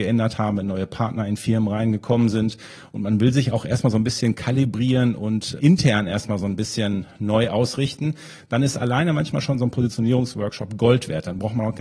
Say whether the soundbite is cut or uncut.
cut